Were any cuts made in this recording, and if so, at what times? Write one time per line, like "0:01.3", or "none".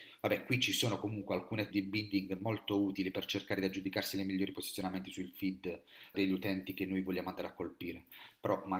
0:01.7
0:06.1